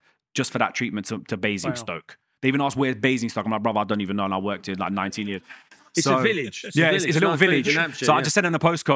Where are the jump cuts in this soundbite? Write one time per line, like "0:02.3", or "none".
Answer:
none